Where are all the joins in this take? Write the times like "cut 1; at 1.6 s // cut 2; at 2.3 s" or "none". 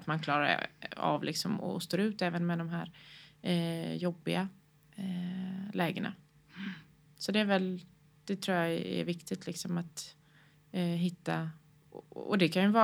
none